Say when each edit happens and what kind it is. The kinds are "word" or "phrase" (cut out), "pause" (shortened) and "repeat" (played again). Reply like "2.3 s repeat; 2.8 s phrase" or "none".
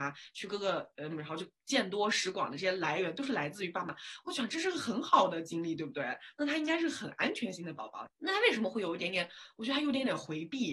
1.1 s word; 8.1 s pause